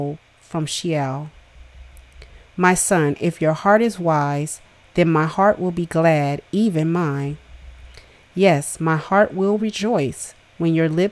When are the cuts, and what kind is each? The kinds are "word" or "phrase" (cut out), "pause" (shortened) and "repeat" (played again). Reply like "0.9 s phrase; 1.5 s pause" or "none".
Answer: none